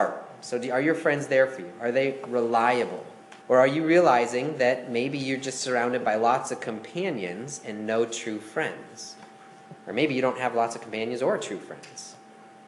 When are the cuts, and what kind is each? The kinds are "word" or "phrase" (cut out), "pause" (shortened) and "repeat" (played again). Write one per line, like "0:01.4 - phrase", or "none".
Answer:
0:03.4 - pause